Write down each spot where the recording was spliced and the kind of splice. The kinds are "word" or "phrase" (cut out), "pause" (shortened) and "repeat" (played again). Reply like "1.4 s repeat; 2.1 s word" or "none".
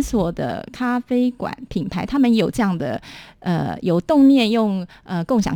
none